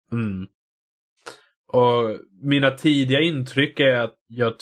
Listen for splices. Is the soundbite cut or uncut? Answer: uncut